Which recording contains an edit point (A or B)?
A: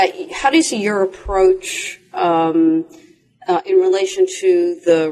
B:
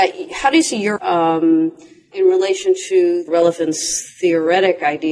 B